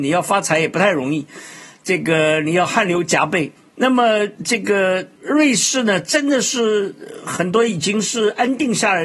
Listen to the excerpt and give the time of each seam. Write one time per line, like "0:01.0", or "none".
0:03.6
0:04.3
0:05.2